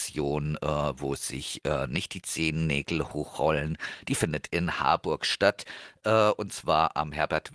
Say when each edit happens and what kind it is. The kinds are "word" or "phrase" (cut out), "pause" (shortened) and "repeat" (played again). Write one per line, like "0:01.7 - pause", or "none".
none